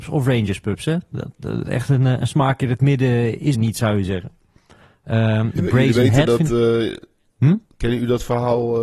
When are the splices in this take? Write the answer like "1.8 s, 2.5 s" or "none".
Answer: 3.5 s, 5.6 s